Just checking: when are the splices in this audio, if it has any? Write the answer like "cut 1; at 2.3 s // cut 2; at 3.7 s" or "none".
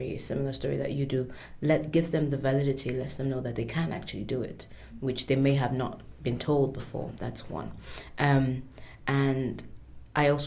none